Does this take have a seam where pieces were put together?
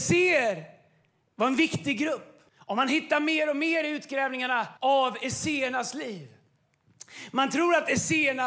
yes; 2 cuts; at 2.5 s, 4.8 s

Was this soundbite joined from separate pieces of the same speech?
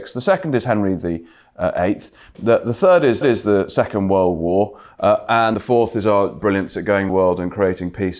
yes; 4 cuts; at 3.2 s, 5.5 s, 6.4 s, 7.1 s

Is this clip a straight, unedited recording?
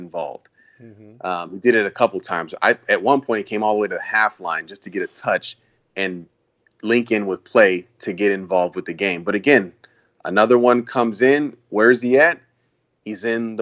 yes; 0 cuts

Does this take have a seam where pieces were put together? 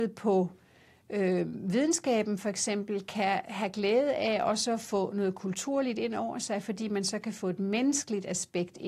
no; 0 cuts

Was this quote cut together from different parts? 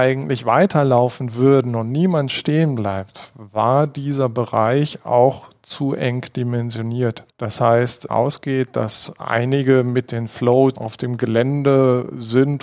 yes; 3 cuts; at 7.3 s, 8.1 s, 10.8 s

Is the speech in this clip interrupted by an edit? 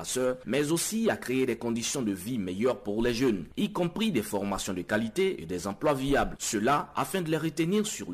no; 0 cuts

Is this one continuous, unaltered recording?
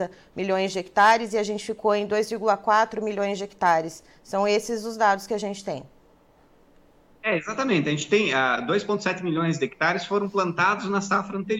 yes; 0 cuts

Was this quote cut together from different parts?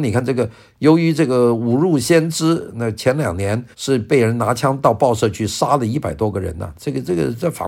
yes; 1 cut; at 3.7 s

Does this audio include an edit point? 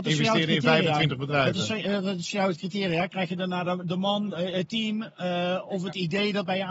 no; 0 cuts

